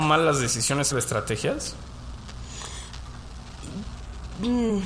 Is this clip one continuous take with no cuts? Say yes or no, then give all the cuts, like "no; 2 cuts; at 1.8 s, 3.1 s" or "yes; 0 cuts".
no; 1 cut; at 0.9 s